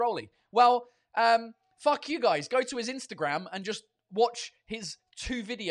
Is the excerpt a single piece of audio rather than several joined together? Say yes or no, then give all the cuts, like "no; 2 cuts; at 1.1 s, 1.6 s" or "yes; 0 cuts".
yes; 0 cuts